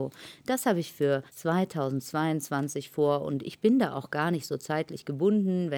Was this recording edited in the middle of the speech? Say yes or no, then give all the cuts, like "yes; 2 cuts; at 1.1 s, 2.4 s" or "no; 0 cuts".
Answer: yes; 1 cut; at 1.3 s